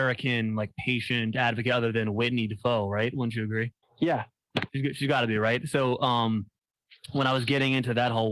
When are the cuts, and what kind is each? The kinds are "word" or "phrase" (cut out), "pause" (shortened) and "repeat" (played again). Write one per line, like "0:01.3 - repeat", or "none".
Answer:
0:03.8 - pause